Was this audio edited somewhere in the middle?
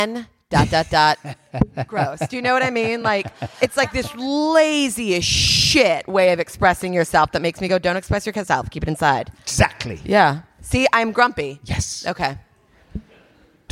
no; 0 cuts

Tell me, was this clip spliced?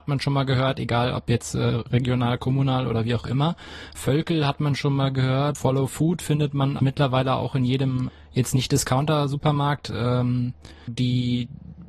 yes; 2 cuts; at 6.8 s, 10.9 s

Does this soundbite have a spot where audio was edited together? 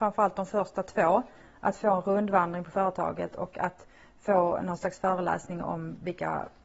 no; 0 cuts

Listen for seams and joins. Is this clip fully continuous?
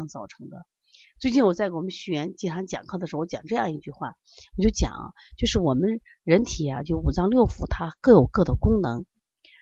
yes; 0 cuts

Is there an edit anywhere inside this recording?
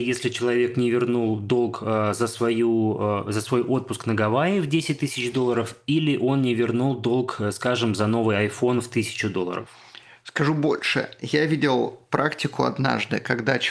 no; 0 cuts

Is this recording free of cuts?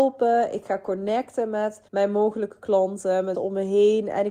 no; 2 cuts; at 1.9 s, 3.3 s

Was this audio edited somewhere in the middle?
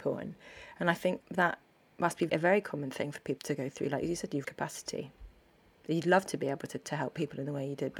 yes; 1 cut; at 4.4 s

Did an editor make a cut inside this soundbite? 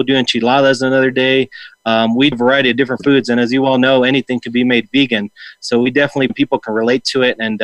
yes; 2 cuts; at 2.3 s, 6.3 s

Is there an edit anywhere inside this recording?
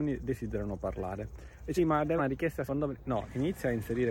yes; 3 cuts; at 1.8 s, 2.2 s, 2.7 s

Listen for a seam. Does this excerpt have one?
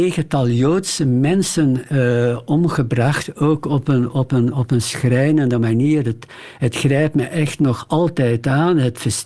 no; 0 cuts

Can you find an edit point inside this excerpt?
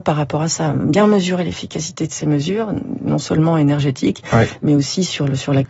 no; 0 cuts

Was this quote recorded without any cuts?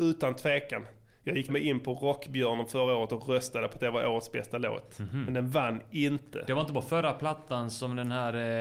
no; 1 cut; at 1.5 s

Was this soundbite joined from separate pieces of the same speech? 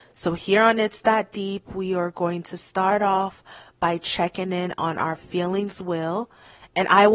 no; 0 cuts

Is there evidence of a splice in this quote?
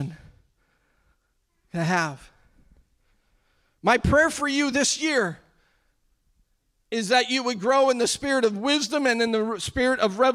no; 0 cuts

